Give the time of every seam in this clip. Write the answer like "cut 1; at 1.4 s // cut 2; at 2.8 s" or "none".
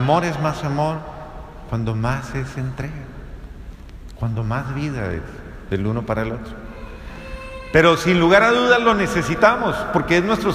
none